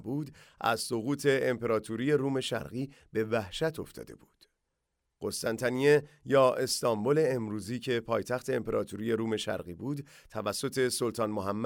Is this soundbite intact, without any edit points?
yes; 0 cuts

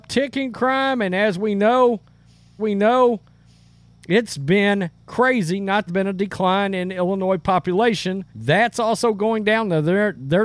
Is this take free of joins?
no; 3 cuts; at 2.6 s, 5.9 s, 8.3 s

